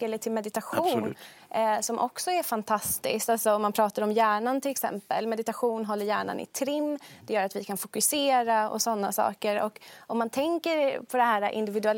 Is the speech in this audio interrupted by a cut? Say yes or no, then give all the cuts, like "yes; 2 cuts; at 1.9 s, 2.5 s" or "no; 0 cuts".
no; 0 cuts